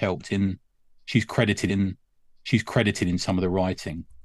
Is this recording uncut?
no; 1 cut; at 1.7 s

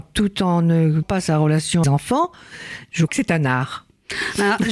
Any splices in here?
yes; 3 cuts; at 1.0 s, 1.8 s, 3.1 s

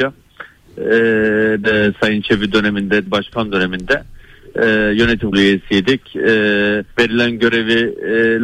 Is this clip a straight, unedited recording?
no; 4 cuts; at 1.6 s, 3.1 s, 5.3 s, 6.9 s

